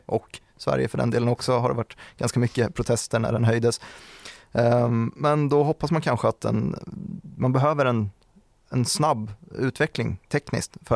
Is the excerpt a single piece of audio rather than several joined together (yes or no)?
yes